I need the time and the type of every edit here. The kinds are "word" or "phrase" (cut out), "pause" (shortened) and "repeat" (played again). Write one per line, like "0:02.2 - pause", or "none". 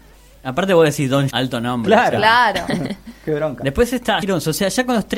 0:01.3 - word
0:04.2 - word